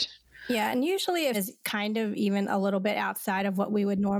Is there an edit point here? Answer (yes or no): yes